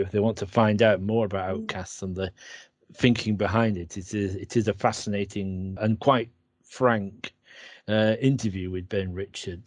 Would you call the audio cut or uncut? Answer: cut